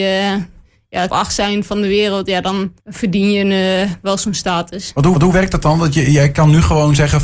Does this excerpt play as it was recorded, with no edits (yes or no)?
no